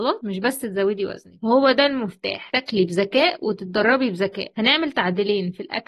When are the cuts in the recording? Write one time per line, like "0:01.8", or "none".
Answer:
none